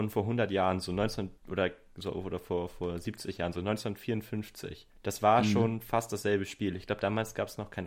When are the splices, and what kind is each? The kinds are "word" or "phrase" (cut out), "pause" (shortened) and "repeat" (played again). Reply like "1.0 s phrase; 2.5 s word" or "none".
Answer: 1.4 s pause; 4.9 s pause